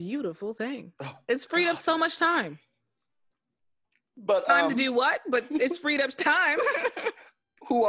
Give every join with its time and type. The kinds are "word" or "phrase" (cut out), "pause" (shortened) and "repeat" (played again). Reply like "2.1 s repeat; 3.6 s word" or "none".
none